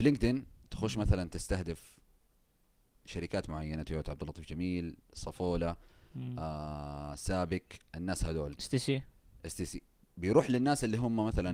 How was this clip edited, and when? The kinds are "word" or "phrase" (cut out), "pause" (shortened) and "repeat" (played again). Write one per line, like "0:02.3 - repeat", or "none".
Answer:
none